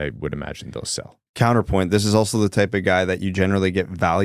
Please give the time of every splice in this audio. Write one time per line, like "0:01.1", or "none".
0:01.3